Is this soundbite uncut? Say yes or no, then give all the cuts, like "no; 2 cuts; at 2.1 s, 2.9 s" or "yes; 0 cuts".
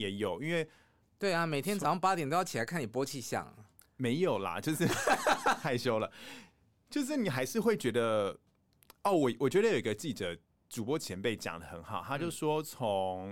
yes; 0 cuts